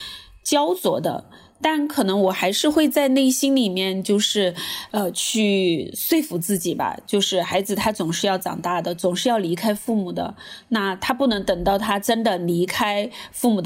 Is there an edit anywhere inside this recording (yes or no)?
no